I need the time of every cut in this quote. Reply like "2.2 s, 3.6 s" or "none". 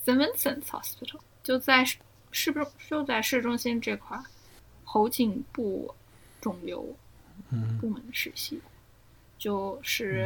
none